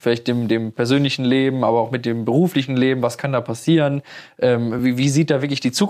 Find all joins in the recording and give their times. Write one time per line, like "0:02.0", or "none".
none